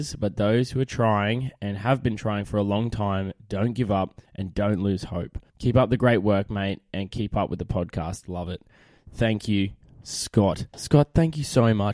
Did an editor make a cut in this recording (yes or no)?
yes